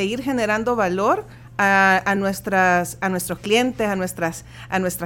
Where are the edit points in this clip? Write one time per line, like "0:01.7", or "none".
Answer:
none